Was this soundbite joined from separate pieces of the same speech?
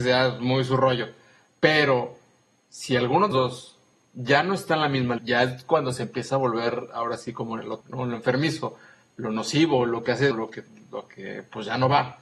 yes; 4 cuts; at 3.3 s, 5.2 s, 7.8 s, 10.3 s

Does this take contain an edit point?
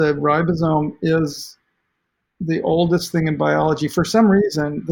no; 0 cuts

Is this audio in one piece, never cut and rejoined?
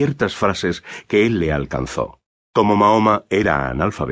no; 1 cut; at 2.4 s

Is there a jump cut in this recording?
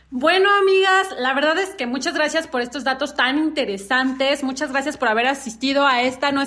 no; 0 cuts

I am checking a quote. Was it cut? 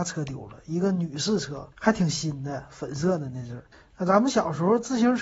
yes; 2 cuts; at 1.7 s, 3.7 s

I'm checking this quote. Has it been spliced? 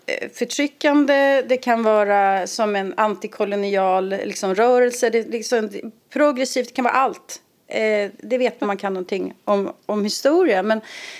yes; 2 cuts; at 7.6 s, 8.6 s

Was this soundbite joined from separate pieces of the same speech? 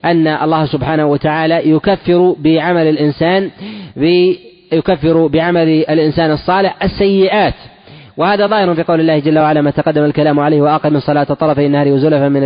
no; 0 cuts

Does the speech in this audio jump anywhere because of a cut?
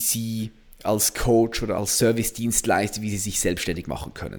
no; 0 cuts

